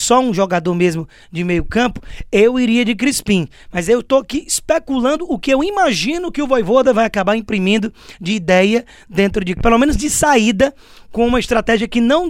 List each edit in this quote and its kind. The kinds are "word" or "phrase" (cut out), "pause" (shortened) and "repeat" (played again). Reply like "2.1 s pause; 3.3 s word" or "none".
9.6 s word